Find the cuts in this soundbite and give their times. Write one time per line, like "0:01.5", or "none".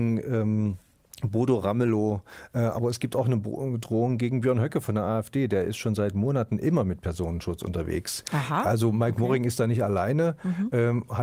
none